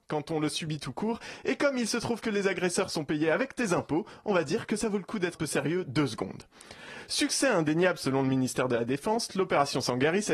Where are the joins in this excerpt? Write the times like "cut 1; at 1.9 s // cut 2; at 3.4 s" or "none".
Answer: cut 1; at 5.3 s